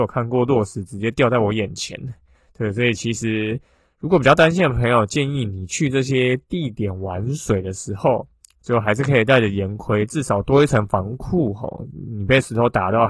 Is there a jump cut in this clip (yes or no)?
no